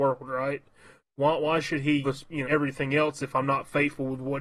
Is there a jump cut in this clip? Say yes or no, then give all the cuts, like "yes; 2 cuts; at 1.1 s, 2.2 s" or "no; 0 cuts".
yes; 2 cuts; at 2.0 s, 2.4 s